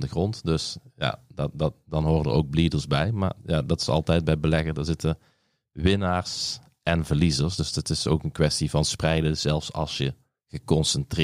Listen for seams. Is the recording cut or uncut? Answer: uncut